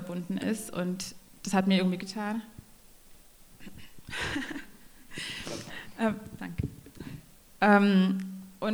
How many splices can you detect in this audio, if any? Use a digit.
1